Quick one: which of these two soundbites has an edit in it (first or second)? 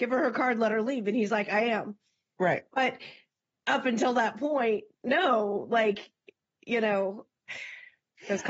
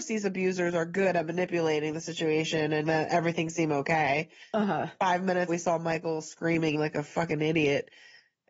second